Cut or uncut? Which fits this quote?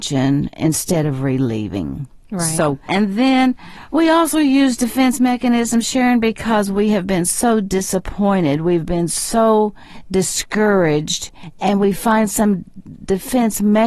uncut